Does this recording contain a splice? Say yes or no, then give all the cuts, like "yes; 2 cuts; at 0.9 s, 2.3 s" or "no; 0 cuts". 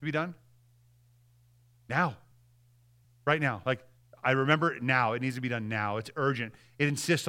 no; 0 cuts